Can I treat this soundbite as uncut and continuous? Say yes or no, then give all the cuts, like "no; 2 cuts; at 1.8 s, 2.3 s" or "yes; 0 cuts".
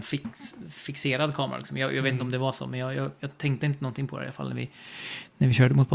yes; 0 cuts